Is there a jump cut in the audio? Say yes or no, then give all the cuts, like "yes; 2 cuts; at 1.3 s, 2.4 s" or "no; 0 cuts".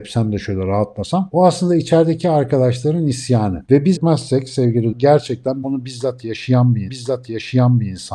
yes; 4 cuts; at 4.0 s, 4.9 s, 5.6 s, 6.9 s